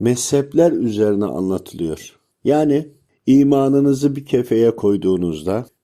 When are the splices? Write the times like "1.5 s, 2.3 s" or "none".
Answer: none